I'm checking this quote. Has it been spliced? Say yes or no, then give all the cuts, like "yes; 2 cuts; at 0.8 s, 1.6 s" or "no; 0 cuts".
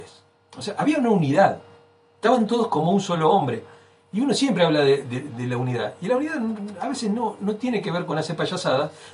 no; 0 cuts